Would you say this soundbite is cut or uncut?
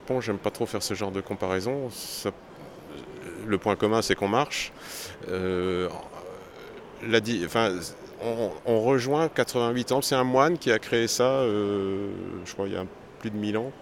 uncut